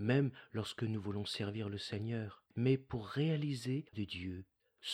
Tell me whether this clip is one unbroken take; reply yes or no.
no